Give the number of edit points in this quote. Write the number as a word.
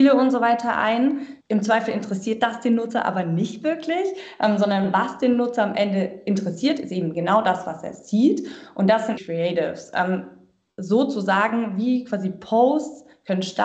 two